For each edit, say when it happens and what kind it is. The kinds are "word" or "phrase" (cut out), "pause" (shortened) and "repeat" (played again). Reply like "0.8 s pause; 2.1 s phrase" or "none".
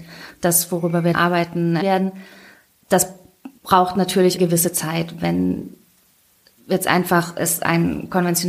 1.1 s word; 1.8 s word; 3.6 s pause; 4.4 s phrase